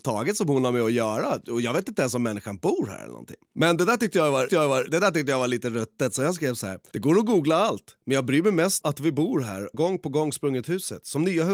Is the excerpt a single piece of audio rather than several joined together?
no; 4 cuts; at 4.5 s, 8.8 s, 9.7 s, 10.6 s

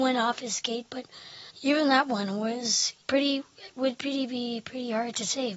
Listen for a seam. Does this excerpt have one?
yes; 2 cuts; at 1.5 s, 3.0 s

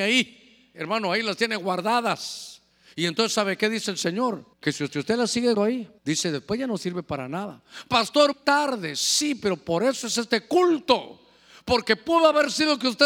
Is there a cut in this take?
yes; 6 cuts; at 2.7 s, 4.5 s, 4.9 s, 5.5 s, 6.0 s, 8.3 s

